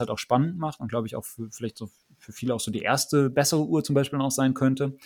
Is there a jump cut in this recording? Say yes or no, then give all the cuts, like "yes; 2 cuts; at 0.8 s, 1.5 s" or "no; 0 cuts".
no; 0 cuts